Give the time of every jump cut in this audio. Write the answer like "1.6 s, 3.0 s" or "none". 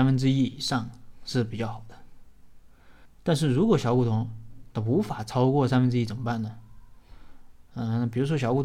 3.1 s